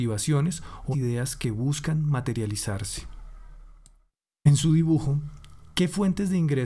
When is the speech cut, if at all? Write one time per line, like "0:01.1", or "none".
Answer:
0:00.9